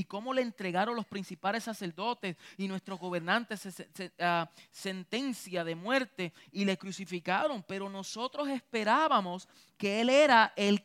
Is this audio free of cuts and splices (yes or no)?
yes